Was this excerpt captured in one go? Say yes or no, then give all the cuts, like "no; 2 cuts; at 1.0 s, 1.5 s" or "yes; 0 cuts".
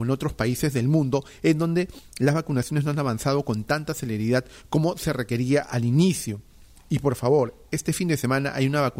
yes; 0 cuts